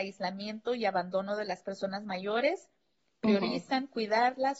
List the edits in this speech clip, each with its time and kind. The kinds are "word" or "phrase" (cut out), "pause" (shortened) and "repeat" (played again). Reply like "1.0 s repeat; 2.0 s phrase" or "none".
none